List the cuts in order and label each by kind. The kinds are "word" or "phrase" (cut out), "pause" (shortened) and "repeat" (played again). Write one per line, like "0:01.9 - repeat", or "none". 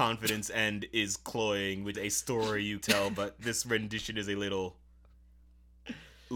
0:01.9 - word
0:02.8 - word